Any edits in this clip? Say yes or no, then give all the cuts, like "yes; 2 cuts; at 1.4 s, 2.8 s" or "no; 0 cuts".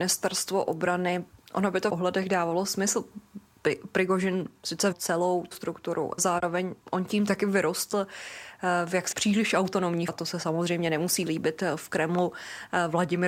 yes; 8 cuts; at 1.4 s, 1.9 s, 4.9 s, 5.5 s, 6.2 s, 9.1 s, 10.1 s, 11.3 s